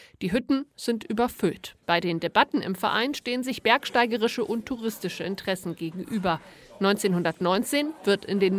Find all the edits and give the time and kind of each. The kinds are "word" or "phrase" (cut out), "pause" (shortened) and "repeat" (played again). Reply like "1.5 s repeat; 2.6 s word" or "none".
1.8 s pause